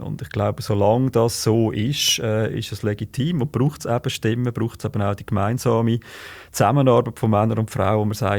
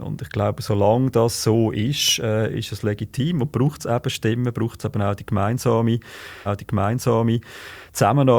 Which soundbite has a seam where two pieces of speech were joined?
second; 1 cut; at 6.5 s

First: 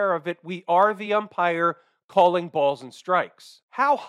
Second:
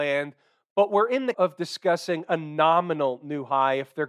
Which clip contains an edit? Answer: second; 1 cut; at 1.3 s

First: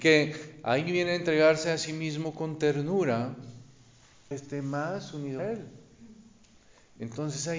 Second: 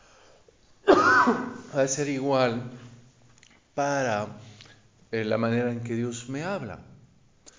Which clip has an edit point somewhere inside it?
first; 2 cuts; at 4.3 s, 5.4 s

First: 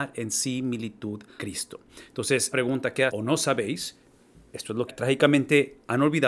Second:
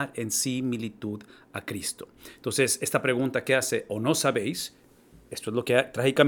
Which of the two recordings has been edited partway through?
first; 4 cuts; at 1.4 s, 2.5 s, 3.1 s, 4.9 s

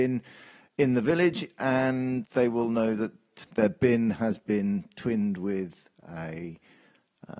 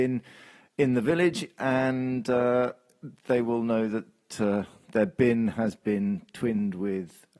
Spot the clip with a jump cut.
first; 2 cuts; at 2.2 s, 3.4 s

